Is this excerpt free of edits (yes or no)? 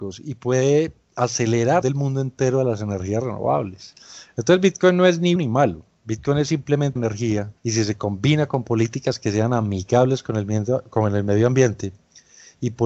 no